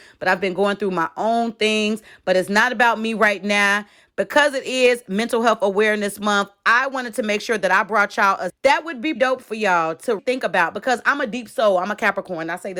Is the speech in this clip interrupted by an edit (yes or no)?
yes